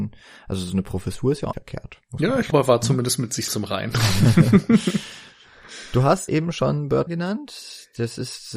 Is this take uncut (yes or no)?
no